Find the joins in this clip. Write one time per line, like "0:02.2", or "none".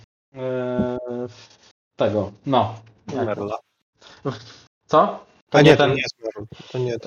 none